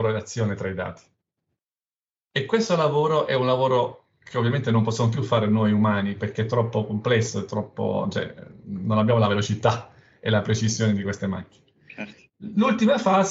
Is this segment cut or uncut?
uncut